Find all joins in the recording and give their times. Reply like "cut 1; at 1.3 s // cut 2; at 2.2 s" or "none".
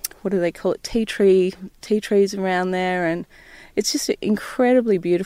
none